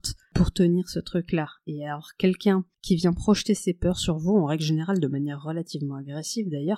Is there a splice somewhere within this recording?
no; 0 cuts

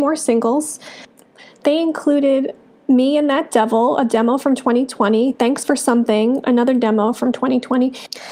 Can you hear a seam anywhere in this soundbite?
no; 0 cuts

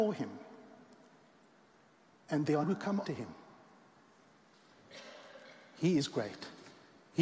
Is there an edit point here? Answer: yes; 2 cuts; at 2.6 s, 3.0 s

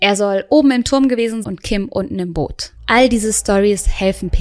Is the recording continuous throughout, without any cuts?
no; 1 cut; at 1.4 s

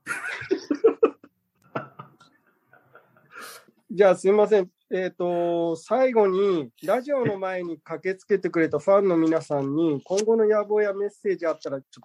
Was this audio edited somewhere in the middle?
yes; 1 cut; at 6.7 s

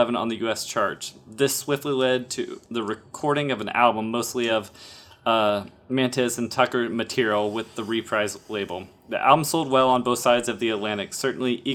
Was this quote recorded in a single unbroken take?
yes; 0 cuts

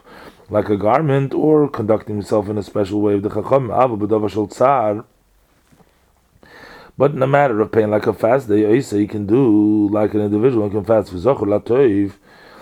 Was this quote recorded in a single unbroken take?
yes; 0 cuts

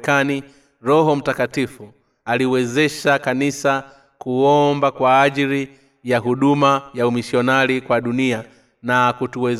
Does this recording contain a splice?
no; 0 cuts

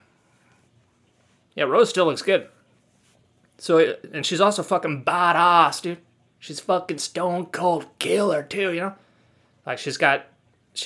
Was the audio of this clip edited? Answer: no; 0 cuts

